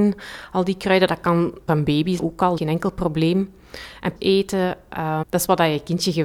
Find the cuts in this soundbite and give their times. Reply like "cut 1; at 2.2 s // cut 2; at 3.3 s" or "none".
cut 1; at 1.7 s // cut 2; at 2.2 s // cut 3; at 2.6 s // cut 4; at 4.2 s // cut 5; at 5.2 s